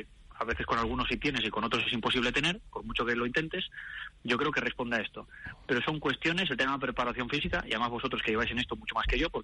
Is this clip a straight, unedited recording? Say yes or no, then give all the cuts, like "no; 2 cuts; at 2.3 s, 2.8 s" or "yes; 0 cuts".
yes; 0 cuts